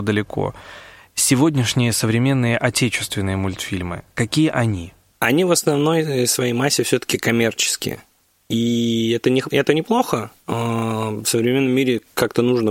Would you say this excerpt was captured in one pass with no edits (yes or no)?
yes